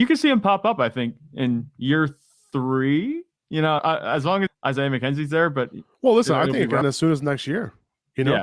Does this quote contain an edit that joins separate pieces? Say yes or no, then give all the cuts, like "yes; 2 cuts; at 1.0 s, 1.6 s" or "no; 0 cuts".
yes; 3 cuts; at 3.8 s, 4.5 s, 6.8 s